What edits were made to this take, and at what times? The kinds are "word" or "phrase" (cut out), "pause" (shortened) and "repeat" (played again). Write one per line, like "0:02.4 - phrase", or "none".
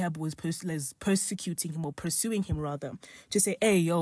none